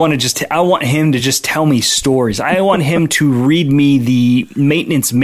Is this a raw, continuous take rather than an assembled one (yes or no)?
yes